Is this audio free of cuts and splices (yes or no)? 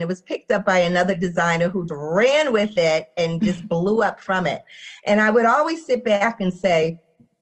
no